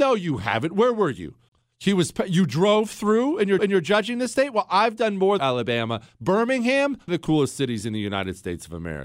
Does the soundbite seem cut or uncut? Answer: cut